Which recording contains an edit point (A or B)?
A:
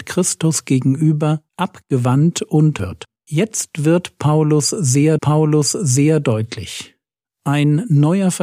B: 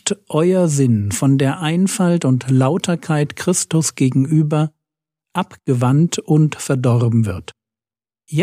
A